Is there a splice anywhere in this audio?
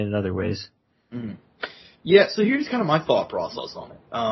no; 0 cuts

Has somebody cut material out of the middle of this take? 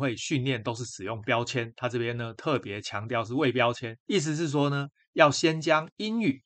no; 0 cuts

